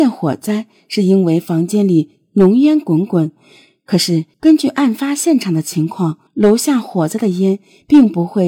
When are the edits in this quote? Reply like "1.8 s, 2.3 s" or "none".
4.3 s, 6.3 s